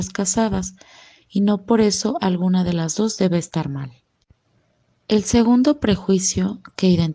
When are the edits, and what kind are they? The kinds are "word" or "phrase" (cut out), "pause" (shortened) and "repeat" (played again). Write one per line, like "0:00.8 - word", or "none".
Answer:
none